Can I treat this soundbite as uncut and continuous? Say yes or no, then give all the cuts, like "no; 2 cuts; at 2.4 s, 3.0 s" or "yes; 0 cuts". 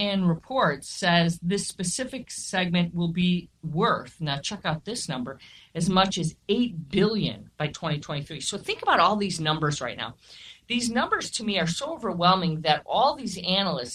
yes; 0 cuts